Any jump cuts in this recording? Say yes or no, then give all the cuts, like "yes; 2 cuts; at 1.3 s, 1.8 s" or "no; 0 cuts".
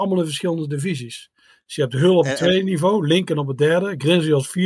no; 0 cuts